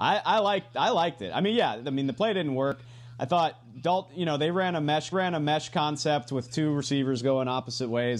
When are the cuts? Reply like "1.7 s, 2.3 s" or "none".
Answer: 5.1 s